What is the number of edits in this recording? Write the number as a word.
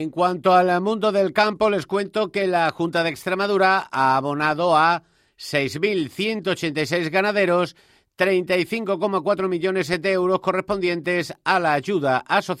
zero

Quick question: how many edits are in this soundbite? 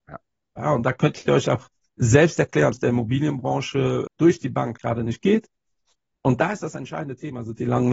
four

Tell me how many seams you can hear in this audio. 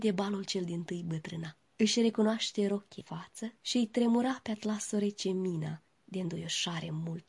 three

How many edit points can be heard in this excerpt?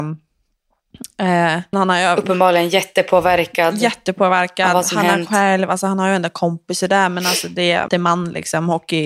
two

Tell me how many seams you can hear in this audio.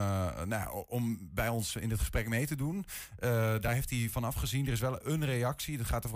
zero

